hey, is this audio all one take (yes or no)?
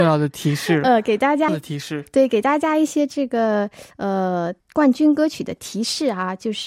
no